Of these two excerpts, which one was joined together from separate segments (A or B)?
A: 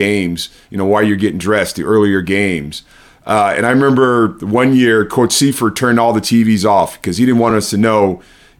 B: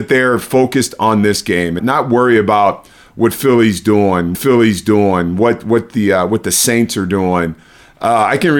B